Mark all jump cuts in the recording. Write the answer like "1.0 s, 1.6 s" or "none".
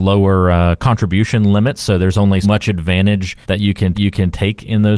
2.4 s, 3.4 s, 3.9 s